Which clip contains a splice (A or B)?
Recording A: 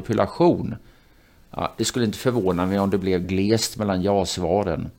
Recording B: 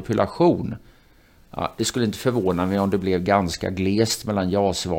A